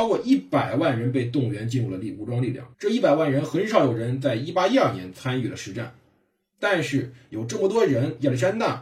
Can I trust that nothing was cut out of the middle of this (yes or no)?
no